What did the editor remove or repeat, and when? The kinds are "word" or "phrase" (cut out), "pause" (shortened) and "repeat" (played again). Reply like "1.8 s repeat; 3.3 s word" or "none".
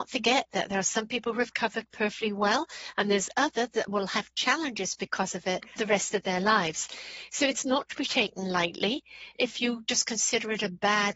5.8 s word; 9.4 s word